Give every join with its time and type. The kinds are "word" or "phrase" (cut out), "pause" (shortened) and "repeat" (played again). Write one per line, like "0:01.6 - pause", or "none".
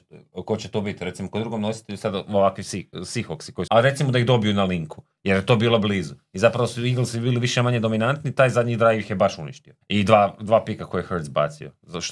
0:03.7 - phrase
0:09.8 - pause